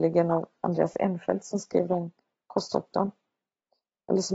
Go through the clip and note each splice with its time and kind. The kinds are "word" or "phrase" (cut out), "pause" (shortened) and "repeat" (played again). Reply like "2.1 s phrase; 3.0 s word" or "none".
none